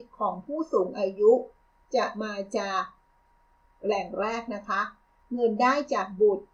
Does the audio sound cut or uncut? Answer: uncut